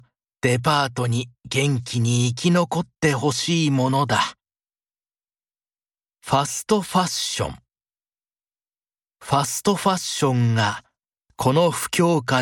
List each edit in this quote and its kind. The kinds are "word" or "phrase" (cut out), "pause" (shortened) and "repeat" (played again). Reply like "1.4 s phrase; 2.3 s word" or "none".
none